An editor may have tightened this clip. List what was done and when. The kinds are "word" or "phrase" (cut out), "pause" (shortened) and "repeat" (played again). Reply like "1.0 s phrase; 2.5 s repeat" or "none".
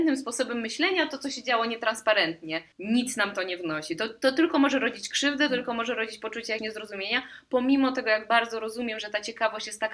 2.7 s pause; 6.6 s word

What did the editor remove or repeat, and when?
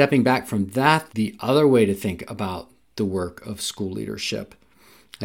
1.1 s word

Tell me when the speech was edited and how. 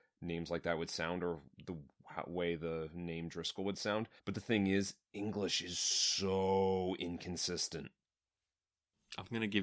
4.2 s pause

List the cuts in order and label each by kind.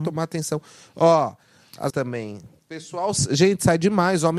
1.9 s word

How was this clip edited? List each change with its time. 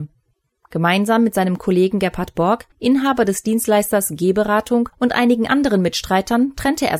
2.7 s pause; 4.9 s pause

